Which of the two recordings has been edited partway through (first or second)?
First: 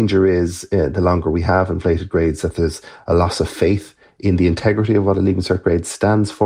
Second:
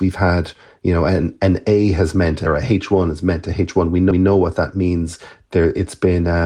second